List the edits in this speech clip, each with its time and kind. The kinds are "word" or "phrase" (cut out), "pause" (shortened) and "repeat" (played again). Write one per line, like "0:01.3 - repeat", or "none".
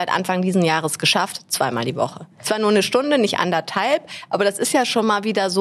none